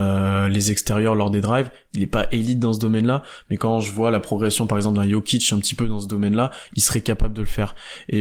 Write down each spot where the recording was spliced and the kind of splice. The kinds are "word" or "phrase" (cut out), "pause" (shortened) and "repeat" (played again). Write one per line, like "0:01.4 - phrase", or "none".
none